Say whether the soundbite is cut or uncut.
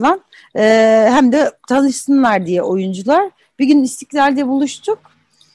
uncut